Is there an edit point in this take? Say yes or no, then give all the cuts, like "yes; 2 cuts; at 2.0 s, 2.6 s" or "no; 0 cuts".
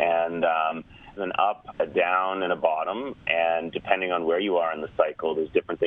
yes; 2 cuts; at 1.2 s, 1.7 s